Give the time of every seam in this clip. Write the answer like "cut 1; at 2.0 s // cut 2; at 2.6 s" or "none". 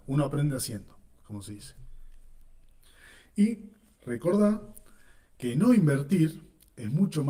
none